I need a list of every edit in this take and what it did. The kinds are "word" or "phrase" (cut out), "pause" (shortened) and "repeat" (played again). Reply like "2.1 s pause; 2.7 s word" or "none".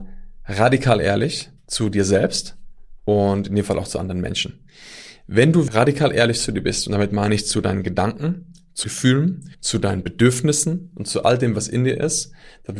5.7 s word; 8.8 s word; 9.5 s pause

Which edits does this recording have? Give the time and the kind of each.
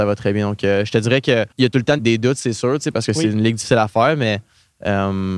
1.5 s pause; 2.0 s word

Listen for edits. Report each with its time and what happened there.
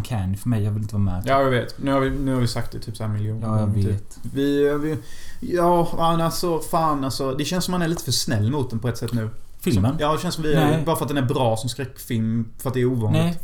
none

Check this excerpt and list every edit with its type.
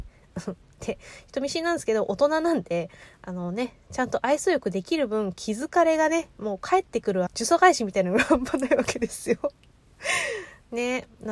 7.3 s phrase

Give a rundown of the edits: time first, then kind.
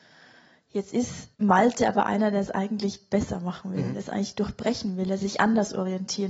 1.3 s pause

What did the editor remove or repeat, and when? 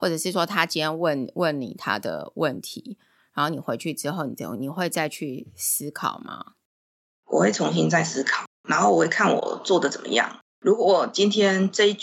10.5 s pause

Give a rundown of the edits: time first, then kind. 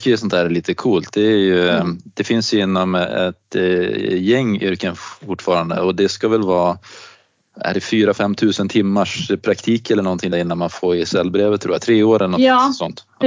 10.3 s word

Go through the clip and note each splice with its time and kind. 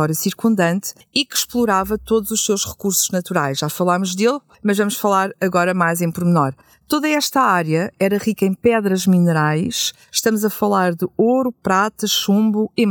none

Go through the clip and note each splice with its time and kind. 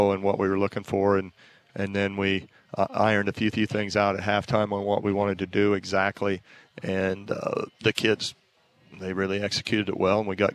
3.5 s repeat; 7.7 s pause

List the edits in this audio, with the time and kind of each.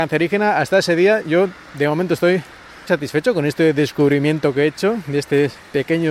2.9 s word

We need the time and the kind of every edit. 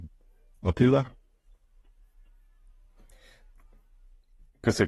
none

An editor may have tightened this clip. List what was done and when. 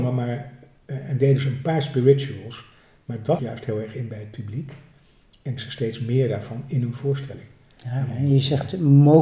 3.4 s word; 5.6 s phrase

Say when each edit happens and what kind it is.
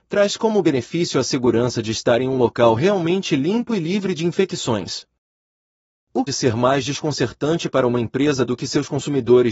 6.3 s phrase

